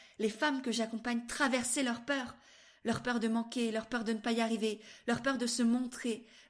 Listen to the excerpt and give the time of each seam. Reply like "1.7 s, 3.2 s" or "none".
none